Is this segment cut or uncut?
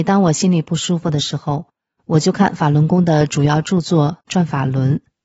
uncut